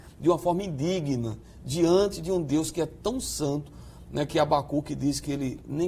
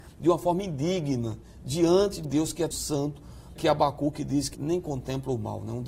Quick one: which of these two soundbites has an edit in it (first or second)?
second